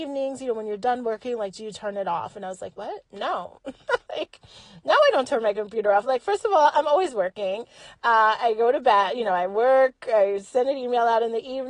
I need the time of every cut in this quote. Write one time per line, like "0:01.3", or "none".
0:03.1
0:04.1